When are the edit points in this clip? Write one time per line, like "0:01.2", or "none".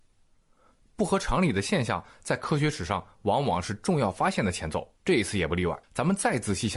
0:05.0
0:05.8